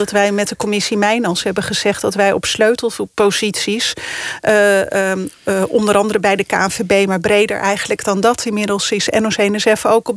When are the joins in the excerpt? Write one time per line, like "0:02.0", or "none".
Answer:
none